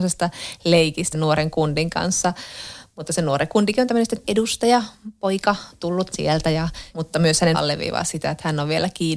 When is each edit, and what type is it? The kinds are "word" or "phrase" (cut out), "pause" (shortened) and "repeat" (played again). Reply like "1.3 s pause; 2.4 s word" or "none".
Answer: 1.1 s word; 4.2 s word; 6.1 s word; 6.9 s pause; 7.5 s word